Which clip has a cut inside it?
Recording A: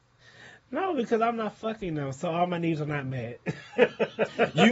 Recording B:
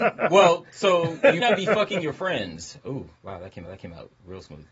B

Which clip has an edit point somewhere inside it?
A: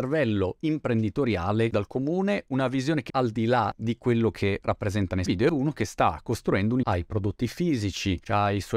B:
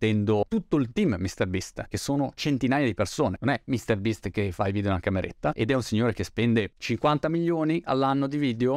A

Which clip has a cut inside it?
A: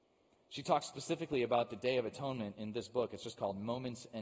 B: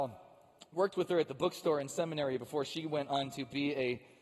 A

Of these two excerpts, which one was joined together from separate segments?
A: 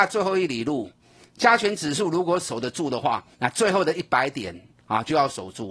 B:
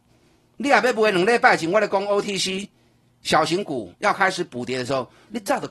A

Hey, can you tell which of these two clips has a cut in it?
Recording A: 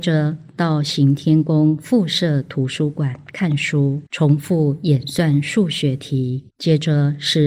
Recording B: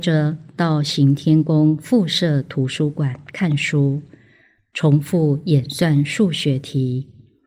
A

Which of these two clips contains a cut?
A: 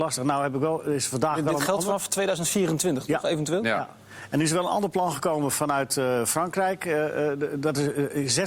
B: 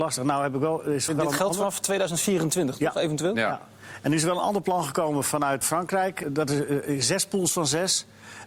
B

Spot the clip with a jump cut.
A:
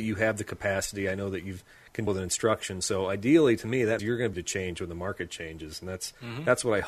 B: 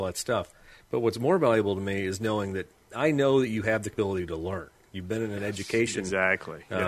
A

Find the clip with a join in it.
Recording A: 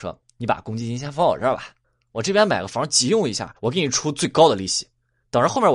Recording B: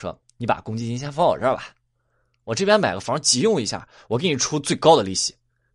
A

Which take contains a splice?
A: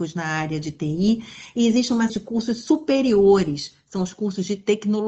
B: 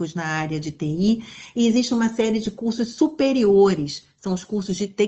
A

